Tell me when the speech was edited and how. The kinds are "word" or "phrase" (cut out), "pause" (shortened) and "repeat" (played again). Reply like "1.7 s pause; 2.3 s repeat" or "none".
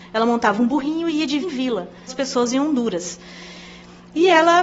1.4 s word; 2.1 s word